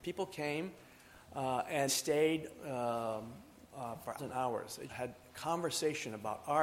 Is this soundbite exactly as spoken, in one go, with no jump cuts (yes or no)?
no